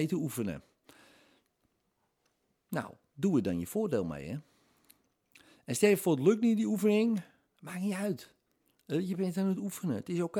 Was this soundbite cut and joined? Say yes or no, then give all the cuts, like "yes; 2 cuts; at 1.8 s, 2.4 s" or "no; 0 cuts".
no; 0 cuts